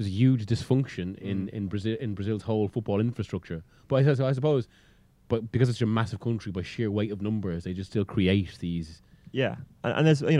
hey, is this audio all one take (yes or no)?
yes